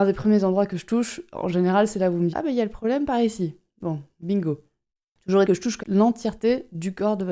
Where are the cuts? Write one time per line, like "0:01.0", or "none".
0:02.3
0:05.4
0:05.8